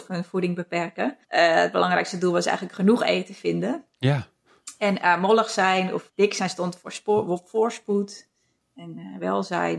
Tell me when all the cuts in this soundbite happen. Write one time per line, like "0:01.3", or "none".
0:01.2
0:06.1

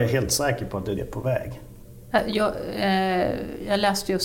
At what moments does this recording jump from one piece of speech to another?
0:00.9

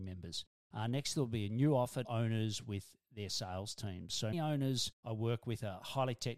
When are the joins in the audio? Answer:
0:02.0
0:04.3

